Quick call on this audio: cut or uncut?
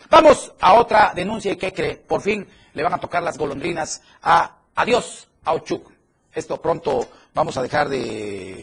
uncut